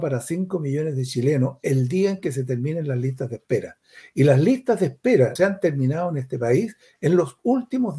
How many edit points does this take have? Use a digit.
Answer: 1